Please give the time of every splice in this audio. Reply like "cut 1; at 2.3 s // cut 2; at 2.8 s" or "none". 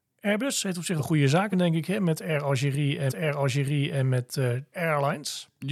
cut 1; at 1.0 s // cut 2; at 1.5 s // cut 3; at 3.1 s // cut 4; at 4.7 s